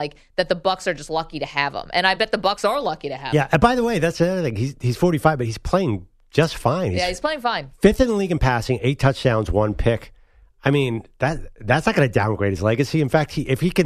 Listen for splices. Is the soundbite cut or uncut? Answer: uncut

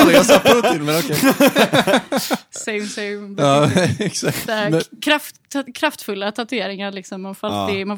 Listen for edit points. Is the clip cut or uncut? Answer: cut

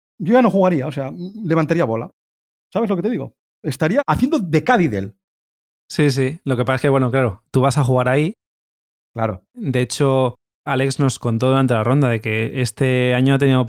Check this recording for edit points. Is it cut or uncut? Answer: uncut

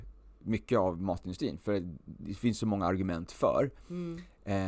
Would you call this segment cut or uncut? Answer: uncut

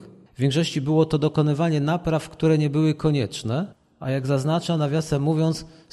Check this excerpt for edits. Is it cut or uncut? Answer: uncut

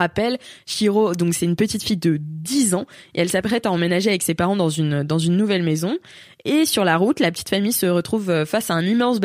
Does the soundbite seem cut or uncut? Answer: uncut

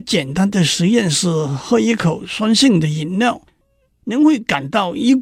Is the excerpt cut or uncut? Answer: uncut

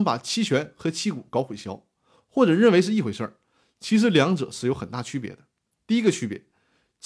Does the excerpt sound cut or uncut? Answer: uncut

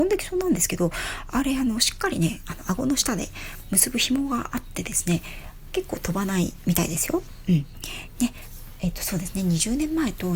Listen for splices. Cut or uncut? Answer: uncut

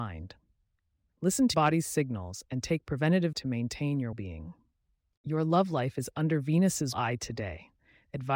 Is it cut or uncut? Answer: cut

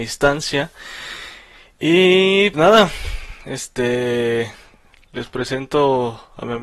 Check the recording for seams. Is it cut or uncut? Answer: cut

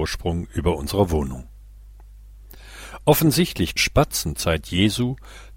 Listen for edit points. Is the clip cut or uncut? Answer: cut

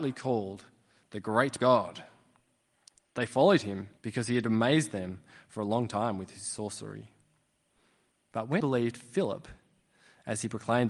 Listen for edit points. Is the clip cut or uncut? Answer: cut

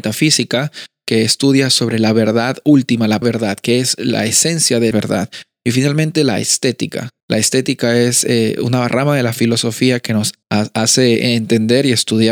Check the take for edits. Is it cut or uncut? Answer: cut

